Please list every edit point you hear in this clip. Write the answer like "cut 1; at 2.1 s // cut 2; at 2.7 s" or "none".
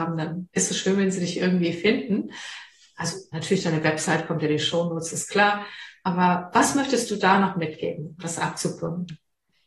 none